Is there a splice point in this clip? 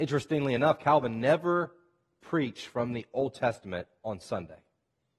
no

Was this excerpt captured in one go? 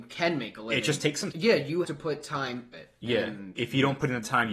no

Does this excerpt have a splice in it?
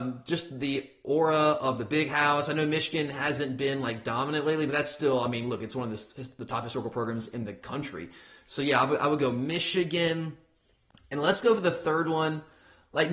no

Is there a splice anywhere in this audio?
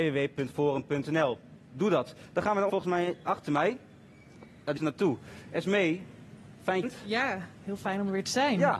yes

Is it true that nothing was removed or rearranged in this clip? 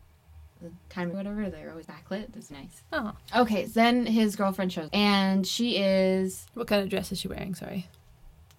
no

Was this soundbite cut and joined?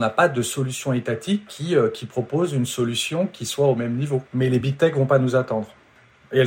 no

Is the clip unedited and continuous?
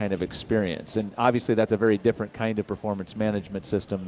yes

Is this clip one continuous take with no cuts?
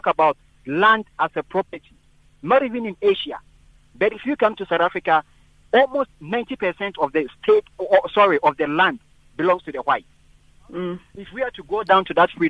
yes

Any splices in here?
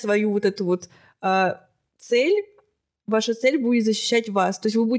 no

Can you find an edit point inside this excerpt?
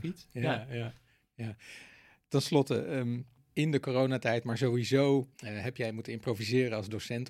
yes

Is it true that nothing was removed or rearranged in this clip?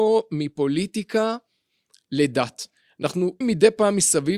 no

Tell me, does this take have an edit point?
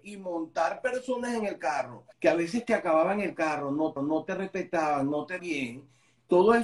yes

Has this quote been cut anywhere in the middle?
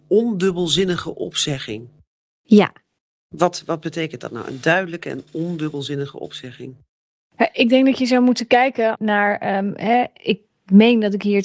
no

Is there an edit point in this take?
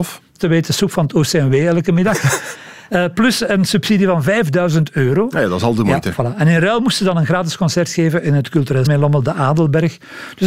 yes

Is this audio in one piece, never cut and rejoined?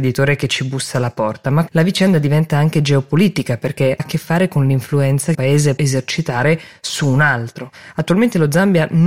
no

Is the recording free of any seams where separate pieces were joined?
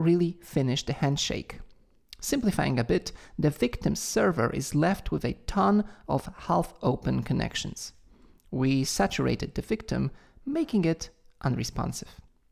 yes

